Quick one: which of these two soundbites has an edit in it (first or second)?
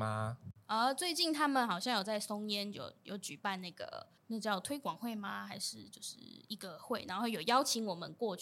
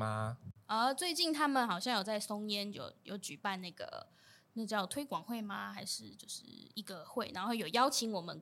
first